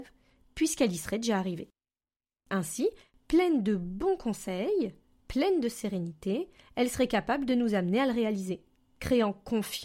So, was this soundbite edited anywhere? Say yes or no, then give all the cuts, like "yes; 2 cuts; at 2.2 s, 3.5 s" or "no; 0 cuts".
no; 0 cuts